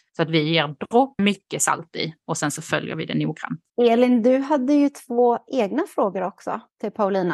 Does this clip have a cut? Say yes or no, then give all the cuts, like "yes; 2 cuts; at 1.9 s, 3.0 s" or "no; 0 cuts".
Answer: yes; 2 cuts; at 1.2 s, 3.7 s